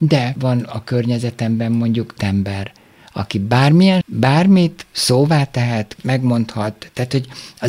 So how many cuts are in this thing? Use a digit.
3